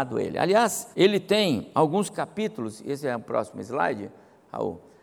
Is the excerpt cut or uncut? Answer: cut